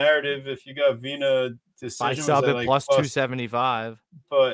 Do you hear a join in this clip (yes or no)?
no